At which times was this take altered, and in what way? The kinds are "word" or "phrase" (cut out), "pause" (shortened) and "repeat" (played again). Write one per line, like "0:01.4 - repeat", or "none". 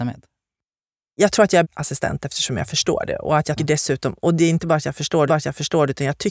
0:01.6 - word
0:03.6 - word
0:05.3 - repeat